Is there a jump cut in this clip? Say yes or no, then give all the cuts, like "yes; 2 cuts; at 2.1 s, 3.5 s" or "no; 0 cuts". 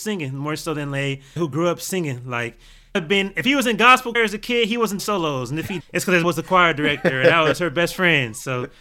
yes; 6 cuts; at 1.4 s, 2.9 s, 4.1 s, 5.0 s, 5.8 s, 6.2 s